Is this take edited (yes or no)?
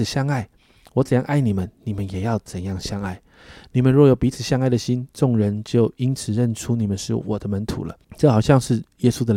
yes